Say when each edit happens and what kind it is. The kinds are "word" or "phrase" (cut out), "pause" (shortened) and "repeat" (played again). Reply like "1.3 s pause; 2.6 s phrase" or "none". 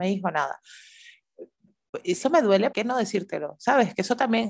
2.2 s word; 2.7 s word